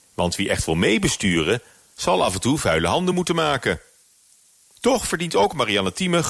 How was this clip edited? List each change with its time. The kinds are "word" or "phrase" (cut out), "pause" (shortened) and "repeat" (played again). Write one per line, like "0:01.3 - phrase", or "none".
none